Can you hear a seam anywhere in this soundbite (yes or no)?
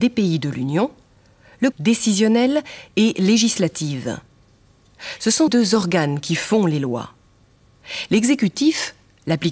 yes